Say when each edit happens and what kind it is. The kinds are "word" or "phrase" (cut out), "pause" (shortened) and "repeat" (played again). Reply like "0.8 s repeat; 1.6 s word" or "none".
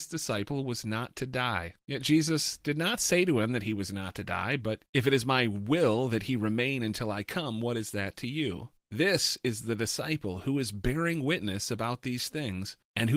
none